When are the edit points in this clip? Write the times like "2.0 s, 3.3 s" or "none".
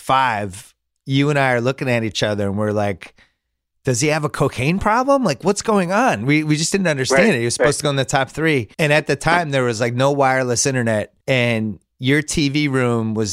8.7 s, 11.2 s